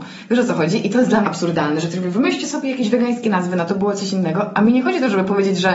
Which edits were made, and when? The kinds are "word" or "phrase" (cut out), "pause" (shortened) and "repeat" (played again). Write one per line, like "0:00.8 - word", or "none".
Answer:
0:01.2 - phrase
0:03.7 - word